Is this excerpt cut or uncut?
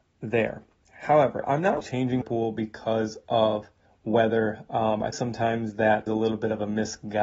cut